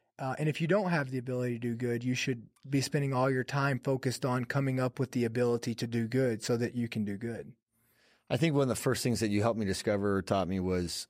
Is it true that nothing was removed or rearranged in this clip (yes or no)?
yes